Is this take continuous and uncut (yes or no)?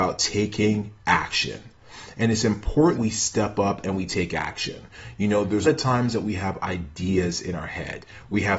no